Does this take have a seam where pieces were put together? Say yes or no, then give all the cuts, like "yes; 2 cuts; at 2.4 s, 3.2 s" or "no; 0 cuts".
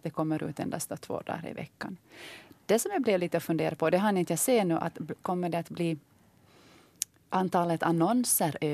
no; 0 cuts